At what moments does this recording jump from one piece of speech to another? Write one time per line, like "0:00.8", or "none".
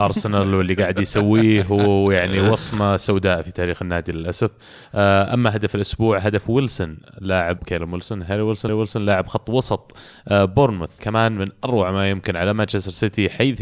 0:04.8
0:07.6
0:08.7
0:11.0